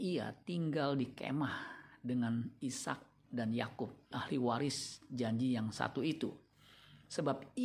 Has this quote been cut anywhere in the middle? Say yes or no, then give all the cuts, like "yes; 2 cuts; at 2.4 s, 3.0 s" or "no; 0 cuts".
yes; 1 cut; at 4.1 s